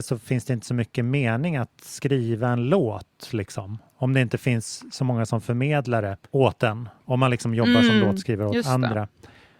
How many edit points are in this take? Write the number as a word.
one